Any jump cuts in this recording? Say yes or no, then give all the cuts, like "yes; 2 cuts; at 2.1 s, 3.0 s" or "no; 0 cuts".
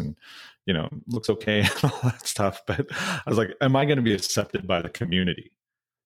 no; 0 cuts